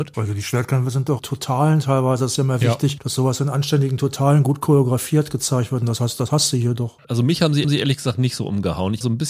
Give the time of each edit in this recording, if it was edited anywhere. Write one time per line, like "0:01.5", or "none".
0:01.2
0:07.6

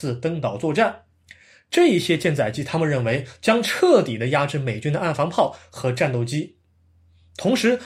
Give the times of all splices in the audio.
none

